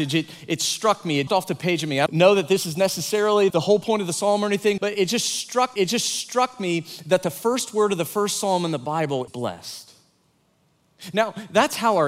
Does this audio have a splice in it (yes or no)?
yes